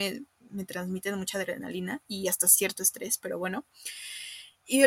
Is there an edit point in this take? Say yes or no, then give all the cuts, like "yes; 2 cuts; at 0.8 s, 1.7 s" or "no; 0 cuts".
no; 0 cuts